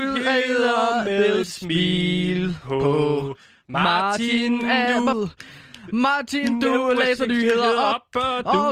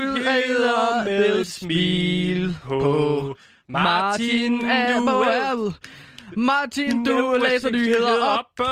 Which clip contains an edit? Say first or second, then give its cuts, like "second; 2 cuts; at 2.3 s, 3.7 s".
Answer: first; 1 cut; at 5.1 s